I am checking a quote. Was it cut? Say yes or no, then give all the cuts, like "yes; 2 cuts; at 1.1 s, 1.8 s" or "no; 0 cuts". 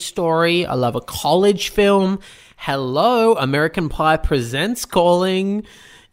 no; 0 cuts